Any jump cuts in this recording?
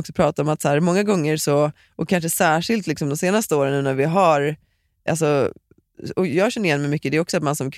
no; 0 cuts

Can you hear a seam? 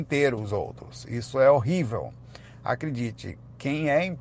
no; 0 cuts

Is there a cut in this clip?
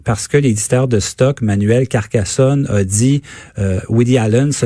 no; 0 cuts

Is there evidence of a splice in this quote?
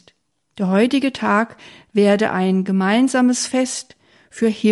no; 0 cuts

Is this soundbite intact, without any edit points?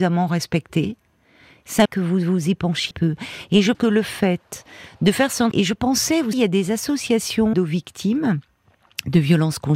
no; 6 cuts; at 1.9 s, 2.9 s, 3.7 s, 5.5 s, 6.3 s, 7.5 s

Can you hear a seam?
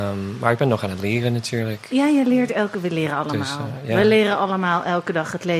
no; 0 cuts

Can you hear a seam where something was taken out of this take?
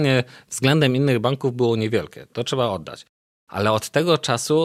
no; 0 cuts

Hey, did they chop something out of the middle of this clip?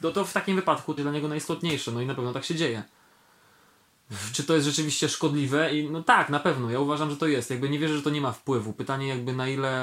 yes; 1 cut; at 1.0 s

